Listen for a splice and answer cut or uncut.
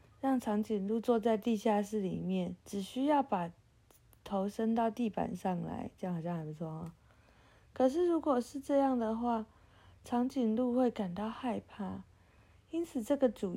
cut